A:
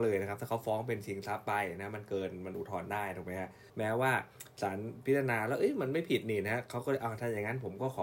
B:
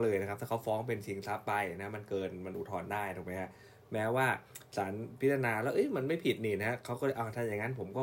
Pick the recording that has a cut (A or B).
A